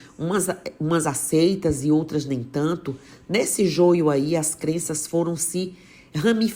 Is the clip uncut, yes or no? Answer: yes